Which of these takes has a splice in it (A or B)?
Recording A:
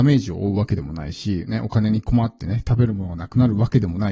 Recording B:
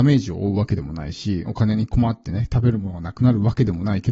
B